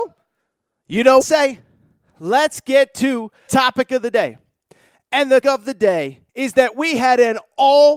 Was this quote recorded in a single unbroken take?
no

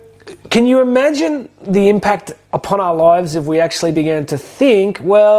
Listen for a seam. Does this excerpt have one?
no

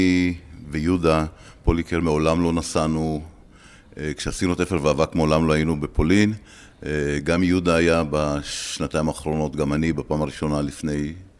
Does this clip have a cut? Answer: no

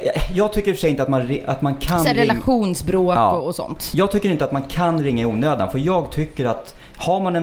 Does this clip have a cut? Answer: no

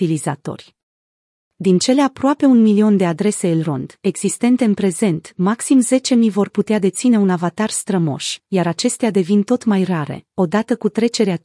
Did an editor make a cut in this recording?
no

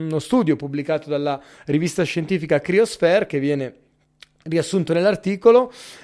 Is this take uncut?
yes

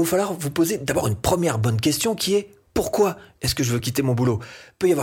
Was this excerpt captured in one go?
yes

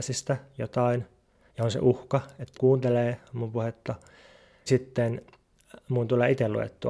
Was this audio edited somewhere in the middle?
yes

